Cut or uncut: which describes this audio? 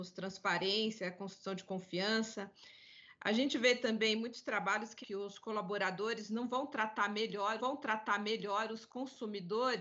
cut